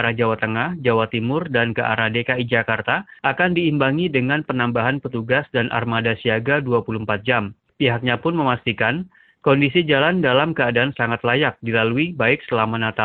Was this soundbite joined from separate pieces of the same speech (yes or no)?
no